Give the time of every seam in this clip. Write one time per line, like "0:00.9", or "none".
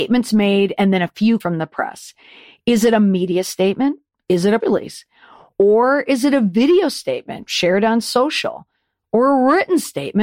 0:01.4
0:04.6